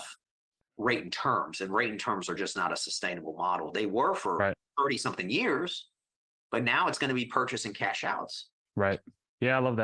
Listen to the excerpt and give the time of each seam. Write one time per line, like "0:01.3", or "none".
none